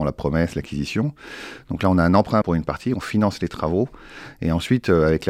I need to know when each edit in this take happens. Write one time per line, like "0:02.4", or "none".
0:02.4